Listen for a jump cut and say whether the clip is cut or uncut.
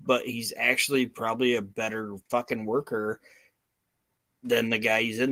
uncut